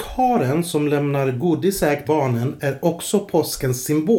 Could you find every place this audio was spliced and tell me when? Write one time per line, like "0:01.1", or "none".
0:02.0